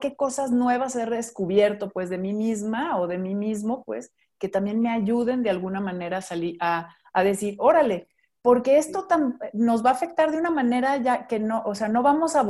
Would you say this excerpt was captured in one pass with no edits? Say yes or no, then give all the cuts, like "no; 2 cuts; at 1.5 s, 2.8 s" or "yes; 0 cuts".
yes; 0 cuts